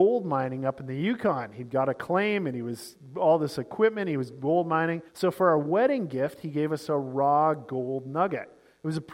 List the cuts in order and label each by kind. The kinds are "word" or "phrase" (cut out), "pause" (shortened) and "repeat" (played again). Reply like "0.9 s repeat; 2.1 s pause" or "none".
5.1 s pause